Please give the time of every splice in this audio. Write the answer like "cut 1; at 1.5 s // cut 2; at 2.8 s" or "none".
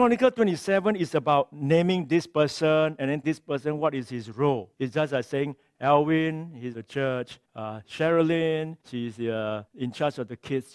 cut 1; at 3.2 s // cut 2; at 4.7 s // cut 3; at 6.7 s // cut 4; at 7.4 s // cut 5; at 8.8 s // cut 6; at 9.7 s